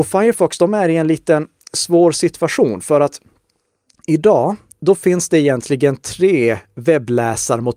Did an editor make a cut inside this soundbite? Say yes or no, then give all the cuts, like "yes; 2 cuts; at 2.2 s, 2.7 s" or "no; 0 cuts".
no; 0 cuts